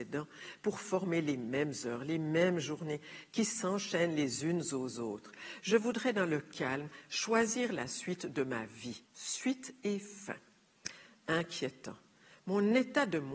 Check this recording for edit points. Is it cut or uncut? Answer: cut